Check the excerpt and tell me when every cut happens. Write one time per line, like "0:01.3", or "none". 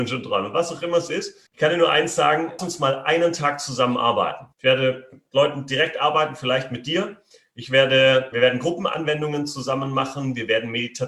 0:01.5
0:02.6
0:04.5
0:08.3